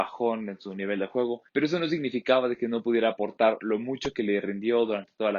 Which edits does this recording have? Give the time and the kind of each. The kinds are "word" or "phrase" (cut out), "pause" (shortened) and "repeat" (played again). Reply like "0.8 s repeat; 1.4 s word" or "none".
1.5 s pause